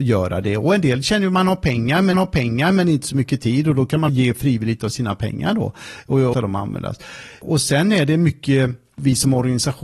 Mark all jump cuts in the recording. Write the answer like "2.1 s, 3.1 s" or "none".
2.1 s, 4.1 s, 6.3 s